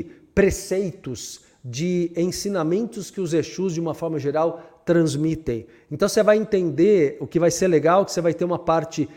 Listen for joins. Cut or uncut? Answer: uncut